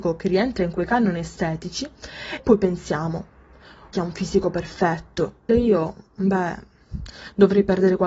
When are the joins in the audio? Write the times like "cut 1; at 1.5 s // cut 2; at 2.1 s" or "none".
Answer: cut 1; at 2.4 s // cut 2; at 3.9 s // cut 3; at 5.5 s